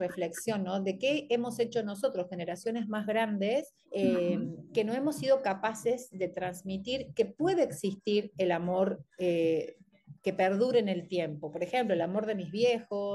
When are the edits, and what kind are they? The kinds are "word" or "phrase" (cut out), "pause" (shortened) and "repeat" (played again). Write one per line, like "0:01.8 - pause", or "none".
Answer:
0:03.8 - pause
0:09.1 - pause